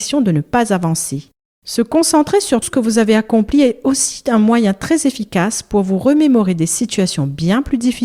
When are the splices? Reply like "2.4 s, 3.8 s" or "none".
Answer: 2.6 s